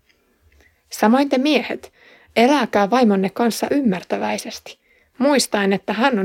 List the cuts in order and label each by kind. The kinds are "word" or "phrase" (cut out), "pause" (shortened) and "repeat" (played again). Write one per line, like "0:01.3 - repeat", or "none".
none